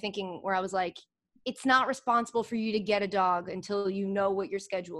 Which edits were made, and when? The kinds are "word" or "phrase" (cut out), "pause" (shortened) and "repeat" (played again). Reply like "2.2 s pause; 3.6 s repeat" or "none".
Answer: none